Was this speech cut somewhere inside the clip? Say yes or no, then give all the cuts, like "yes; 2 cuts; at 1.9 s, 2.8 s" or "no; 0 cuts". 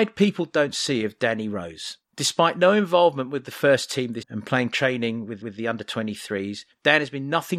yes; 2 cuts; at 4.2 s, 5.4 s